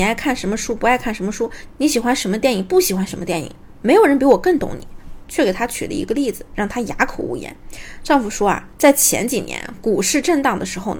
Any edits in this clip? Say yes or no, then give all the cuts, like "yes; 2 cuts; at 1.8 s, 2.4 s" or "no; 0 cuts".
yes; 1 cut; at 5.2 s